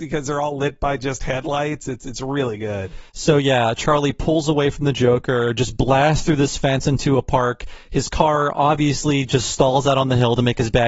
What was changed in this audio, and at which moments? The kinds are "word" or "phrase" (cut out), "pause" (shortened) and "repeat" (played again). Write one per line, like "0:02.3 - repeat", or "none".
0:03.1 - pause